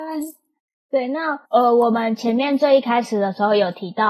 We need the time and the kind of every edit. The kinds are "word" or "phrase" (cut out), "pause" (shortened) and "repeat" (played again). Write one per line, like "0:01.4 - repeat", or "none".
0:01.5 - pause